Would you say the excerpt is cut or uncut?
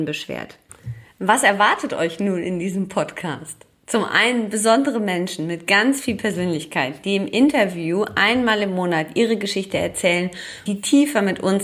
cut